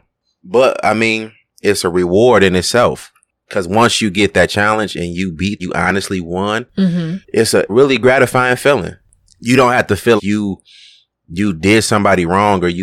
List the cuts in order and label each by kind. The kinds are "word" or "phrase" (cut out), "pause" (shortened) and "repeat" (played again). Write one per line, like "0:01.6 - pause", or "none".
0:05.6 - phrase
0:07.2 - pause
0:07.7 - phrase
0:10.2 - word